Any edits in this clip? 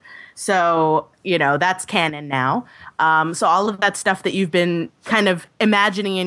yes; 1 cut; at 1.1 s

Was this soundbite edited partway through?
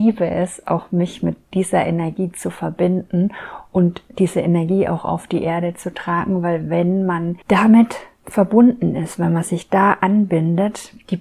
yes; 1 cut; at 7.4 s

